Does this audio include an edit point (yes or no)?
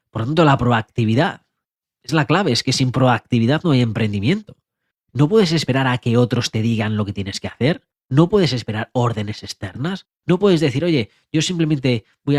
no